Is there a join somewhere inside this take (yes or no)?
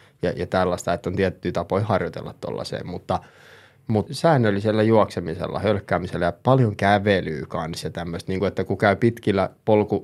yes